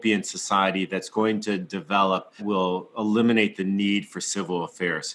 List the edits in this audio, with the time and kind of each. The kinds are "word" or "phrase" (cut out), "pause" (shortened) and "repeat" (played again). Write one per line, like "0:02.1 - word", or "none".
0:02.4 - word